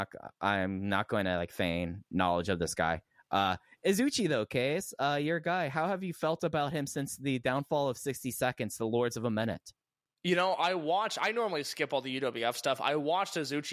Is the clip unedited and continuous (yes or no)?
yes